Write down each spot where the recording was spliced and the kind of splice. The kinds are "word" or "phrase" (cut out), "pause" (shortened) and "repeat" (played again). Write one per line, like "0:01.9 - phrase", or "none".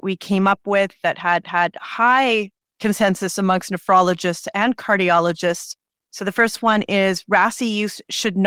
0:01.4 - repeat